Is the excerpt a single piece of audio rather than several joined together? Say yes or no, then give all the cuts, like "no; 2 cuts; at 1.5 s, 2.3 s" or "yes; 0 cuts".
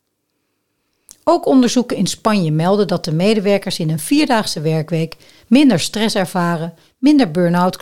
yes; 0 cuts